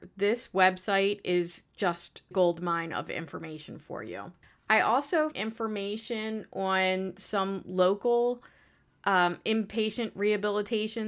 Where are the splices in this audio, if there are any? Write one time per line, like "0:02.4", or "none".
0:02.3
0:04.4
0:05.3